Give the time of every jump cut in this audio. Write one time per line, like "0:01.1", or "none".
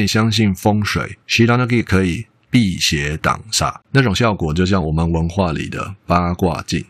0:01.2
0:03.8